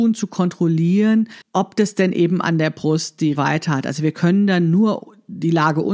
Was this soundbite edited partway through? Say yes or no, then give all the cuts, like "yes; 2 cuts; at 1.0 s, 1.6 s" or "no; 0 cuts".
yes; 2 cuts; at 1.4 s, 3.3 s